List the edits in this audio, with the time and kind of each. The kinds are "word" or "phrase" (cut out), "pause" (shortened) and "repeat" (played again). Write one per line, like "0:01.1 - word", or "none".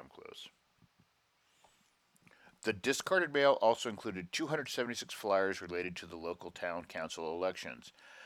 none